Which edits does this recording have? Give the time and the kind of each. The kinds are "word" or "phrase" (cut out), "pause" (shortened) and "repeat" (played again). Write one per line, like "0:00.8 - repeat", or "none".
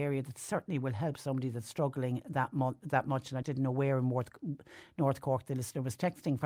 0:03.4 - word